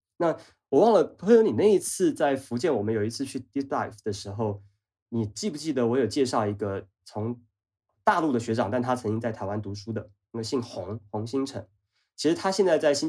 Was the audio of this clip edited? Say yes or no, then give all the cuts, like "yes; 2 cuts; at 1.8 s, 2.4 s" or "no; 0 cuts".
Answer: no; 0 cuts